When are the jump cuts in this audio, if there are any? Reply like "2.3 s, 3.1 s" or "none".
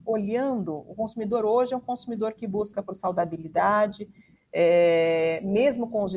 none